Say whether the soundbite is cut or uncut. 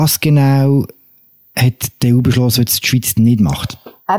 uncut